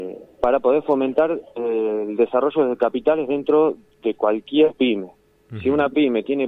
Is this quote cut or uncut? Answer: uncut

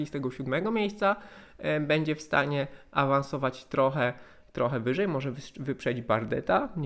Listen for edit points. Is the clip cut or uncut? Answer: uncut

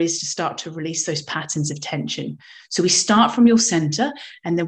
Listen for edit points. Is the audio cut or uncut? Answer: uncut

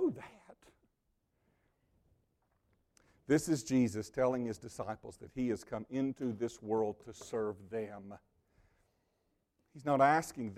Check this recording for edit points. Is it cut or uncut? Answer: uncut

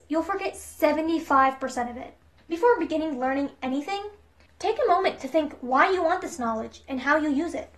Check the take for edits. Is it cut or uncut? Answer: cut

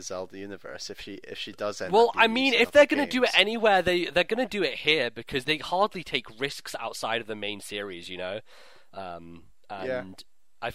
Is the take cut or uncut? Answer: cut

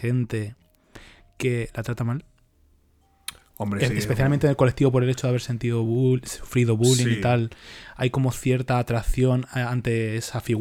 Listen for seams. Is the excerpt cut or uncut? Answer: uncut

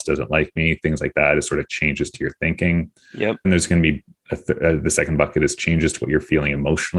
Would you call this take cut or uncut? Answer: cut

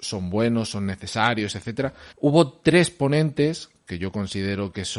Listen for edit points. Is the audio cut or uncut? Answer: cut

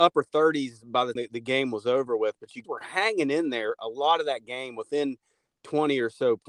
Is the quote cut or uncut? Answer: cut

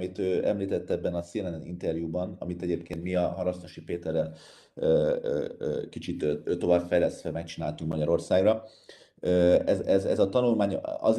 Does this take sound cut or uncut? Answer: uncut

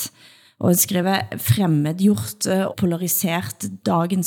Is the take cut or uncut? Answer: cut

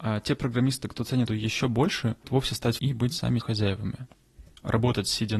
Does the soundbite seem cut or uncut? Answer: cut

